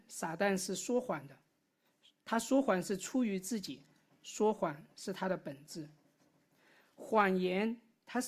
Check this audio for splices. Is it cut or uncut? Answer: uncut